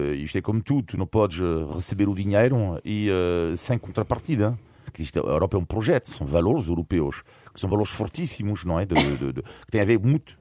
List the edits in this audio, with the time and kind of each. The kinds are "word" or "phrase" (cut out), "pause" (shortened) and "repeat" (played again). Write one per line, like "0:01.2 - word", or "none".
none